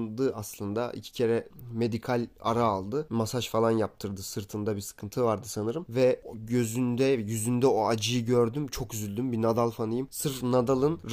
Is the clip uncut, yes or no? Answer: yes